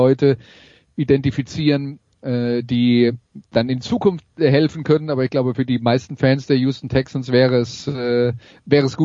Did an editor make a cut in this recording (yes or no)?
yes